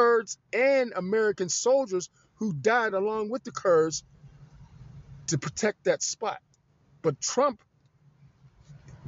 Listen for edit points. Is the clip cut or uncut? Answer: uncut